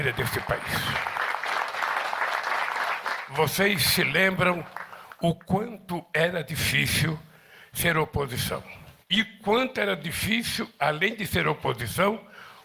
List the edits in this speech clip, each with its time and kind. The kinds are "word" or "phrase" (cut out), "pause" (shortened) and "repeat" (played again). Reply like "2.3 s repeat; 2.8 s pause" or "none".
9.0 s pause